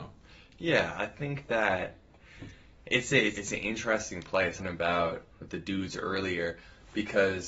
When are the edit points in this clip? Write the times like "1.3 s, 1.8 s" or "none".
3.3 s, 4.6 s, 5.3 s